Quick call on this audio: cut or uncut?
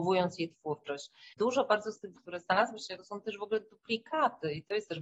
cut